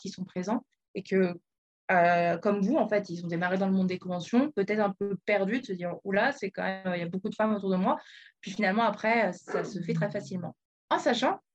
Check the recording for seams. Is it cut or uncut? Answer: uncut